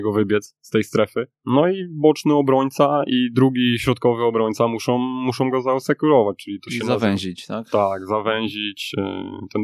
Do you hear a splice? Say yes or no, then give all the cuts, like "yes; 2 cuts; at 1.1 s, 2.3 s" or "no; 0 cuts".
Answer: yes; 1 cut; at 1.3 s